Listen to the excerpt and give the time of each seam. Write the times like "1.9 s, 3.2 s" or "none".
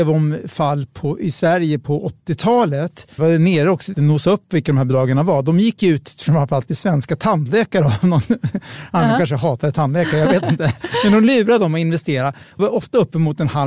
3.2 s, 3.9 s, 12.6 s

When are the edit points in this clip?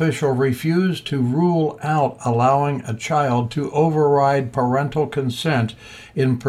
none

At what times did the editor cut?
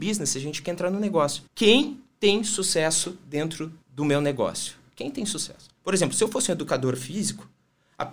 1.5 s, 3.8 s, 5.8 s

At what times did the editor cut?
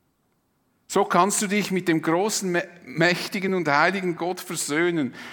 none

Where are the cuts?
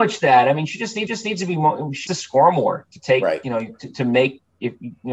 1.1 s, 2.1 s

